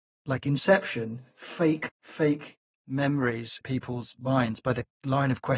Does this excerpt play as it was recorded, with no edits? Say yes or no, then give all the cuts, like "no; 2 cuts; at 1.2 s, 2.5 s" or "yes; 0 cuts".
no; 2 cuts; at 1.9 s, 3.6 s